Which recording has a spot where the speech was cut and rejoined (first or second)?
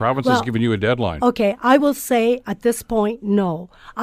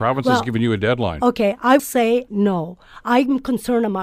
second